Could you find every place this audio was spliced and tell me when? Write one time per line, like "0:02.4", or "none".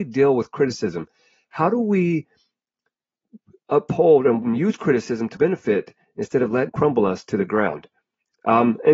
0:04.4
0:05.3
0:06.7